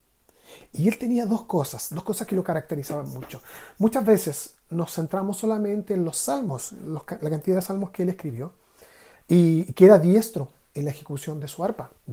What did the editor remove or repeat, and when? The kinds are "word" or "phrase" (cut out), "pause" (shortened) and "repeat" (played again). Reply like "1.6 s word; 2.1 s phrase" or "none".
none